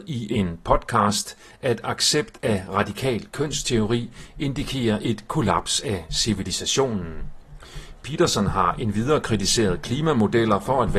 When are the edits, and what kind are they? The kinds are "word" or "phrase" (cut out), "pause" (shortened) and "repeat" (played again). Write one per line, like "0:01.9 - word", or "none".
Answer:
none

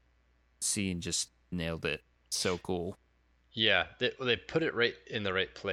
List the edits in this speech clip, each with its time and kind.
none

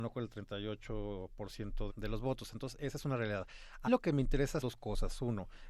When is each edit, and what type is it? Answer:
0:01.9 - word
0:03.9 - word
0:04.6 - word

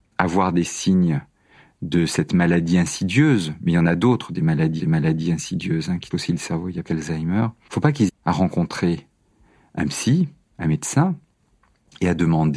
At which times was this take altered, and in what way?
0:04.8 - repeat
0:06.1 - word
0:06.9 - word
0:07.7 - word
0:08.1 - word

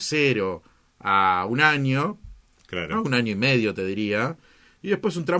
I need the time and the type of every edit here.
none

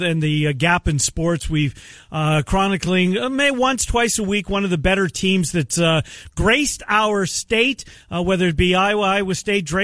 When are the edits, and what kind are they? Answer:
none

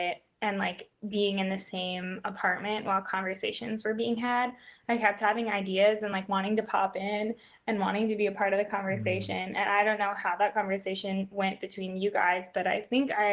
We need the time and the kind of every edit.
none

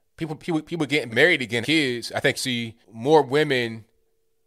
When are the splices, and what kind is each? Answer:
0:01.1 - word
0:01.6 - word
0:02.4 - word
0:02.8 - pause

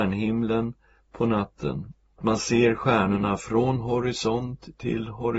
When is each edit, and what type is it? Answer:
0:02.2 - word

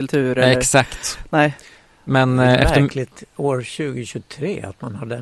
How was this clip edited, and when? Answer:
none

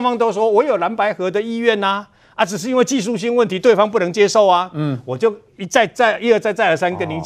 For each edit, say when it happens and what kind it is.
none

